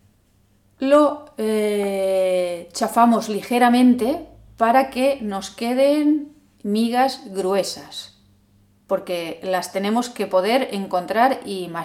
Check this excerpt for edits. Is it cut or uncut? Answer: uncut